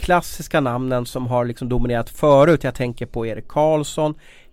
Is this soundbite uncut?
yes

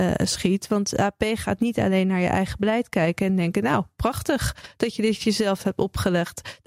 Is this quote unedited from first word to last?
yes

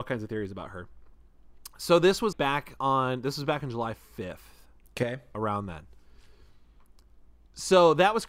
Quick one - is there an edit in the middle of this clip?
yes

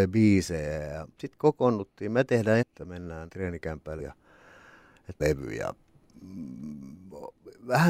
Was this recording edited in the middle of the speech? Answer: yes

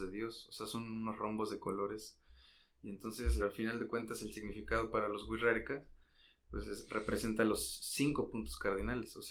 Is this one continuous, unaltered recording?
no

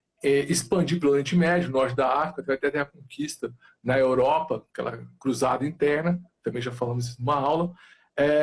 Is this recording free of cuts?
yes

